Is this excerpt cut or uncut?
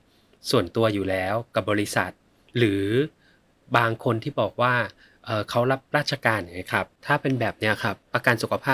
uncut